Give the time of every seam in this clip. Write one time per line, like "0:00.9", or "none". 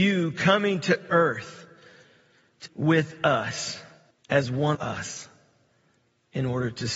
0:02.7
0:04.1
0:04.7